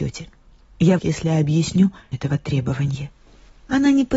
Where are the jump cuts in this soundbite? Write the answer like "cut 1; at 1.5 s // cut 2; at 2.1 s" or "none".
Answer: cut 1; at 1.0 s // cut 2; at 2.1 s